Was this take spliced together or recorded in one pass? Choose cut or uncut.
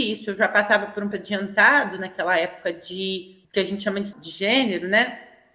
cut